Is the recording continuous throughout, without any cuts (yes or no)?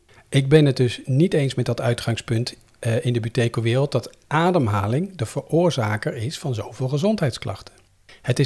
yes